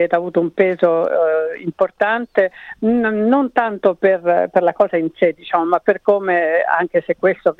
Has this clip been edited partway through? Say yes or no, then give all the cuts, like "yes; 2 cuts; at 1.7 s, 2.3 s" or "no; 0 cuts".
no; 0 cuts